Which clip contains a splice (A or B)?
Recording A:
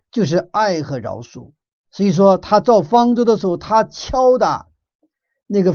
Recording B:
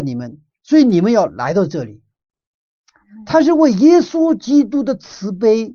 A